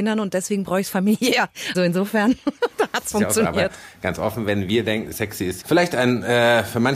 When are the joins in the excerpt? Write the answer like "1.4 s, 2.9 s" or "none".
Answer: 1.7 s, 3.1 s, 5.1 s, 5.6 s